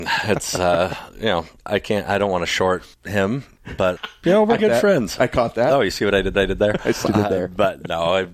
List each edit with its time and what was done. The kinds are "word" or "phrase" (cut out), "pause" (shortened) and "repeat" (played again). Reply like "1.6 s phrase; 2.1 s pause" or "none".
1.6 s pause; 2.9 s pause; 4.0 s word; 4.6 s word; 6.3 s repeat; 7.1 s phrase